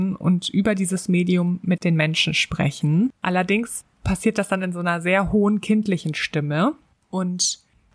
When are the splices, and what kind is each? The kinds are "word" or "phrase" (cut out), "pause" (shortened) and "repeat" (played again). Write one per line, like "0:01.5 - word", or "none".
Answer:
0:03.2 - pause

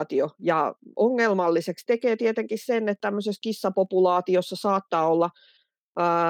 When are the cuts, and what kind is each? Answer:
none

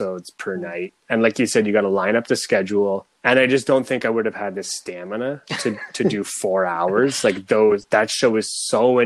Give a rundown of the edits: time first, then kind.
0:03.2 - pause

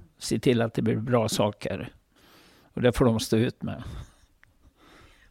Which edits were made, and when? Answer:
none

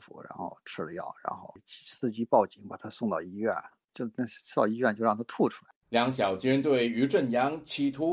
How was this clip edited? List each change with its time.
0:05.8 - pause

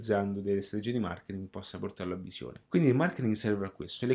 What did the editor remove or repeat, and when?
0:02.7 - pause

